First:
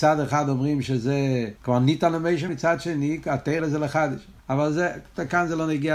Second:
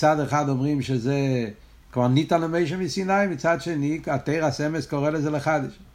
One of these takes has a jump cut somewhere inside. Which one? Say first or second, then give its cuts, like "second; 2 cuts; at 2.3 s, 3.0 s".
first; 4 cuts; at 1.6 s, 2.5 s, 3.6 s, 4.4 s